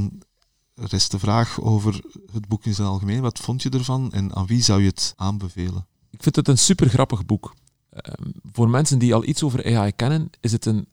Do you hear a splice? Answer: yes; 1 cut; at 4.1 s

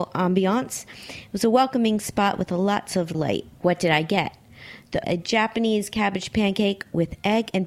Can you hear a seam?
yes; 3 cuts; at 3.1 s, 3.5 s, 5.0 s

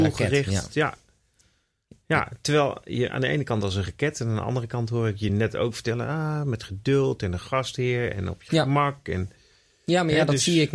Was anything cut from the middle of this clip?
no; 0 cuts

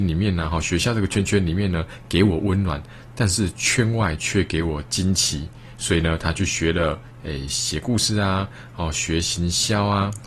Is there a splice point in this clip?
no; 0 cuts

